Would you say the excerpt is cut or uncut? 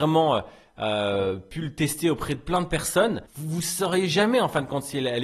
cut